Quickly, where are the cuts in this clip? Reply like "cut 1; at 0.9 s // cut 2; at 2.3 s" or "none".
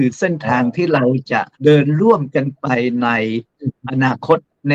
cut 1; at 1.5 s